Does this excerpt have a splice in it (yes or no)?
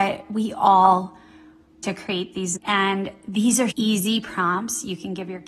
yes